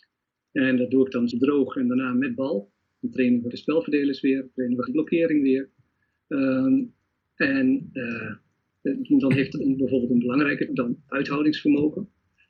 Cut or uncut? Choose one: cut